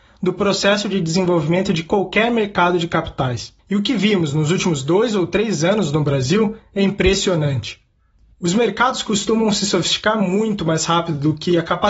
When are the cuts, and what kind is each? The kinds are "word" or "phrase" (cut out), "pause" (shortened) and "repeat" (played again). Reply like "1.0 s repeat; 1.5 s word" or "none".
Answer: none